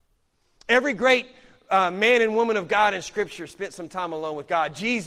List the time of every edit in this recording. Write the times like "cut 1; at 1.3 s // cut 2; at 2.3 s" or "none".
none

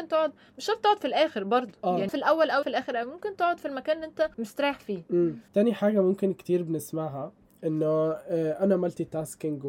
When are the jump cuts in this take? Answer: cut 1; at 2.1 s // cut 2; at 2.6 s // cut 3; at 4.3 s // cut 4; at 5.5 s

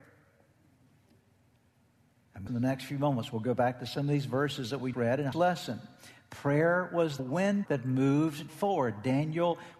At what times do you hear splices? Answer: cut 1; at 2.5 s // cut 2; at 4.9 s // cut 3; at 5.3 s // cut 4; at 7.2 s // cut 5; at 7.7 s // cut 6; at 8.5 s

